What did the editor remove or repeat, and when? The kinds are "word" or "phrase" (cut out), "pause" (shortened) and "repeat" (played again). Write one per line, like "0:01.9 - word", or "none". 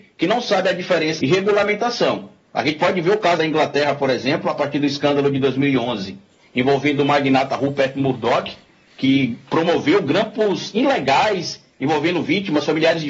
0:01.2 - phrase
0:03.4 - word